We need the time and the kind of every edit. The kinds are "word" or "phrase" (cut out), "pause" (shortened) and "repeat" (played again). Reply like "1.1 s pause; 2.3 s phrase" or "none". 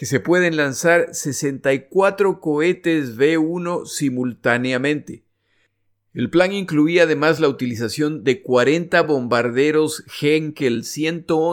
none